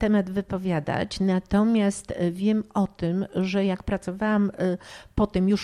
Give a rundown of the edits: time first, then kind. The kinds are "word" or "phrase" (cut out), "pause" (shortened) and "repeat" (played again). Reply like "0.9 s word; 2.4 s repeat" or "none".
none